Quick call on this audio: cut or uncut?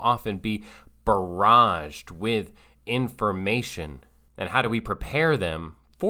uncut